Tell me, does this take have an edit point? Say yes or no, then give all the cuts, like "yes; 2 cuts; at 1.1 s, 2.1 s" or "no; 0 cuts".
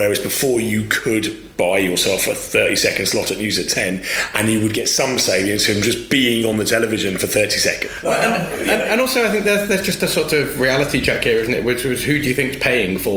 no; 0 cuts